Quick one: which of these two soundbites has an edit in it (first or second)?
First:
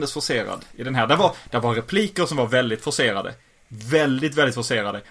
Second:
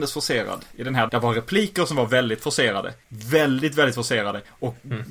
second